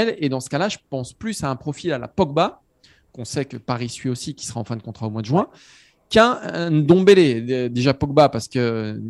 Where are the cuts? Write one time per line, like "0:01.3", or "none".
none